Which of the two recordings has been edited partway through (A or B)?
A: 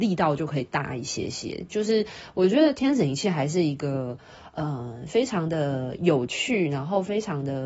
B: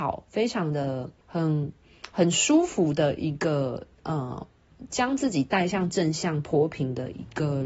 B